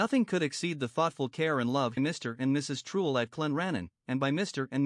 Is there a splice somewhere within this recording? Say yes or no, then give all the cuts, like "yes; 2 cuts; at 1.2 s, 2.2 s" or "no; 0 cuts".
yes; 1 cut; at 2.0 s